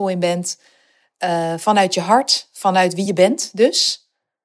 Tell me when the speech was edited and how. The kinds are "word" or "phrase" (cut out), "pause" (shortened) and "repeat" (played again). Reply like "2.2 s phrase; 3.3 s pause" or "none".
none